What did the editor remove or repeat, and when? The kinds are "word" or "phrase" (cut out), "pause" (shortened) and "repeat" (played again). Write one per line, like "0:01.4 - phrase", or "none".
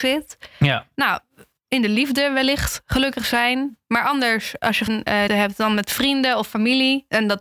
0:04.9 - word
0:05.3 - word

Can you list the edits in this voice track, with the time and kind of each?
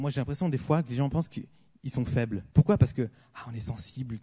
0:02.5 - pause

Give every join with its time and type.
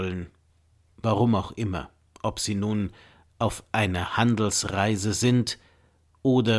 none

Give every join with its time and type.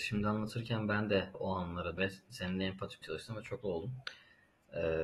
0:01.3 - word
0:02.0 - word
0:03.0 - word
0:03.6 - word

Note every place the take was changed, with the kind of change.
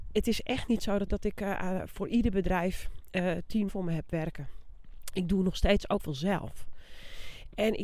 0:01.1 - word
0:03.7 - word
0:06.0 - word

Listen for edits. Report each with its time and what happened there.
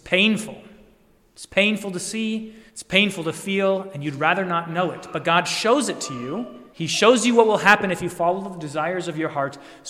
0:02.7 - pause
0:06.7 - pause

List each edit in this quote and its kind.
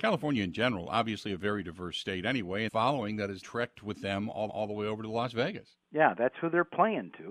0:02.7 - phrase
0:03.4 - word
0:04.5 - repeat
0:05.8 - pause

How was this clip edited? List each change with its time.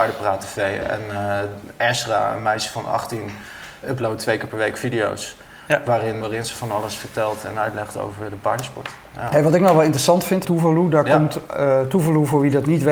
0:03.8 - word
0:06.2 - word
0:10.4 - phrase

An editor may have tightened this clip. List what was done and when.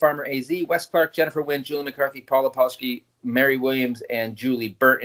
none

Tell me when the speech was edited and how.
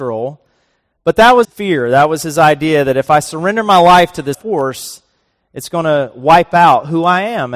0:01.4 - word
0:04.3 - word

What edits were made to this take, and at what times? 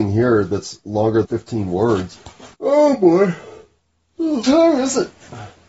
0:01.2 - word
0:02.5 - pause
0:04.4 - word

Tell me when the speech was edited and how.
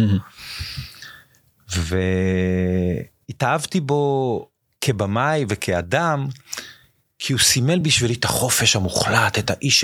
none

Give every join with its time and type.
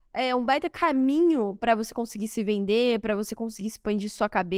none

